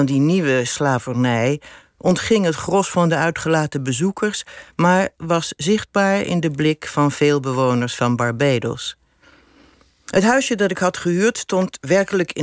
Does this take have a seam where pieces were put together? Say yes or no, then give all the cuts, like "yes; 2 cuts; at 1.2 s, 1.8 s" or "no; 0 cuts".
no; 0 cuts